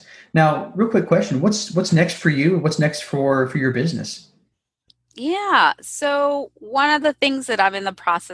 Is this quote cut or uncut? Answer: uncut